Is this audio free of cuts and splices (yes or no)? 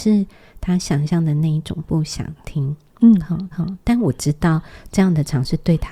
no